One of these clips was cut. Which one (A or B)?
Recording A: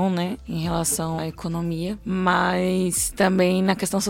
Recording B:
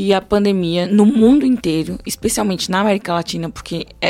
A